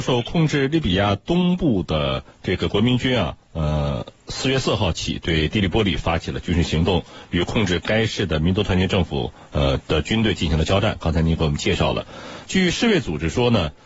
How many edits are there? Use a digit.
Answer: 2